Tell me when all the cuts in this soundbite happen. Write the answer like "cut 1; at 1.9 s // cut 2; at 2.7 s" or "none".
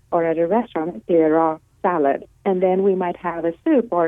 cut 1; at 1.1 s // cut 2; at 2.3 s